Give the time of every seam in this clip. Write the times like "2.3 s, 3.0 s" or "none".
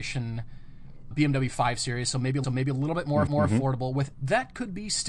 1.1 s, 2.4 s, 3.3 s, 4.1 s